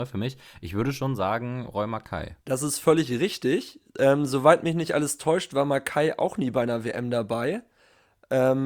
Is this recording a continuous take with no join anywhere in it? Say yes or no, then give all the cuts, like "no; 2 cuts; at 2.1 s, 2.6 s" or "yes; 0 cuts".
no; 1 cut; at 2.4 s